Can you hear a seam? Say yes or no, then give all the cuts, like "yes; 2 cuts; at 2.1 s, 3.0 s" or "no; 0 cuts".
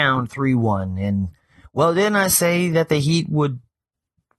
no; 0 cuts